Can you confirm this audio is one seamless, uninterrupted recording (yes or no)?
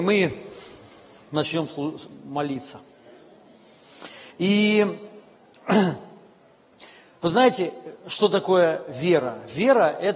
no